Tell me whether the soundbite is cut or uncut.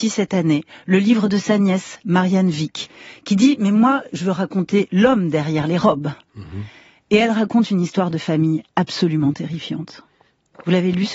uncut